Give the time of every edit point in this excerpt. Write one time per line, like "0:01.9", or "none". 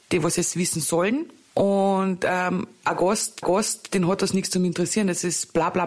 0:03.4